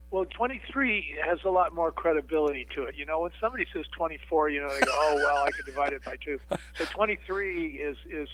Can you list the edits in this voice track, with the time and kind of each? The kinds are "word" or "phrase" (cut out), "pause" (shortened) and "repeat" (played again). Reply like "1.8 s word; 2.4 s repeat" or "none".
6.4 s pause